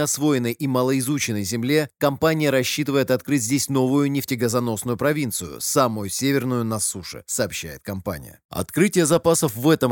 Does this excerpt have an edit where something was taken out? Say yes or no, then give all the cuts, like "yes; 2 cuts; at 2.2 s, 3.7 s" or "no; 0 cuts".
yes; 1 cut; at 8.5 s